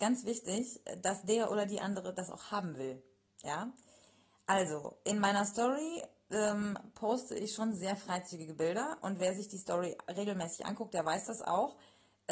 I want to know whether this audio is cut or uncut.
uncut